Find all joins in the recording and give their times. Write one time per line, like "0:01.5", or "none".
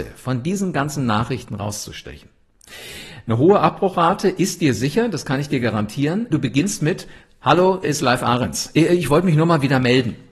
0:06.3
0:07.8